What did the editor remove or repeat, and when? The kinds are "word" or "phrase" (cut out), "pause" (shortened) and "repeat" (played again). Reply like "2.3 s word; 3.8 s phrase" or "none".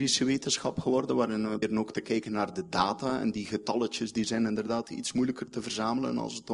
1.6 s word